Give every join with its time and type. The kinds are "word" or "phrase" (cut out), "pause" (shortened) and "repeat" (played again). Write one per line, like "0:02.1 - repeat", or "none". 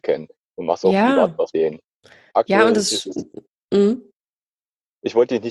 0:01.5 - word